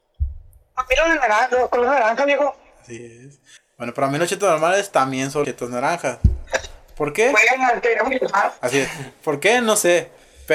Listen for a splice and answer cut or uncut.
cut